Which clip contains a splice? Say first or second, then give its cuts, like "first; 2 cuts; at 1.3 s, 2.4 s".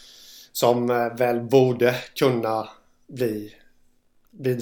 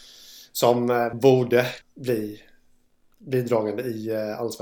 second; 2 cuts; at 1.1 s, 1.8 s